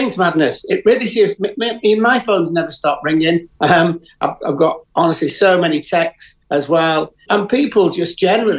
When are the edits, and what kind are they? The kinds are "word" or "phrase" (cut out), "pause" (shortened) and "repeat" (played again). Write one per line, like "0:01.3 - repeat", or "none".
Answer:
0:03.6 - pause
0:06.4 - pause
0:07.3 - word